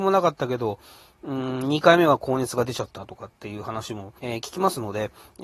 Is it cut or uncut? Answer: cut